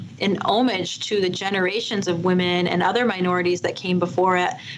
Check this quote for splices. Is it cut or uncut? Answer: uncut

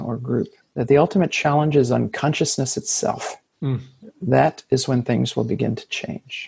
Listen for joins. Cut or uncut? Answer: uncut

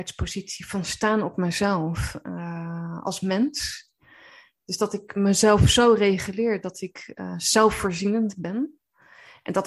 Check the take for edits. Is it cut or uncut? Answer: uncut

